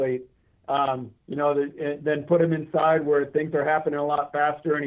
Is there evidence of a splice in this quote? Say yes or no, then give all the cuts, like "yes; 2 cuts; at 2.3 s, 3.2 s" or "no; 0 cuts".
yes; 1 cut; at 1.2 s